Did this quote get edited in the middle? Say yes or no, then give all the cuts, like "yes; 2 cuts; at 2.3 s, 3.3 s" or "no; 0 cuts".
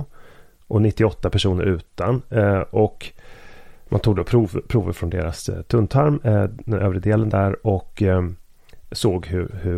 no; 0 cuts